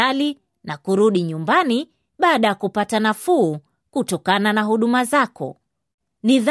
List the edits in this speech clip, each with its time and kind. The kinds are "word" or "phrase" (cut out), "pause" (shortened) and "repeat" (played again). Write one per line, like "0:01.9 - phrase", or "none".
none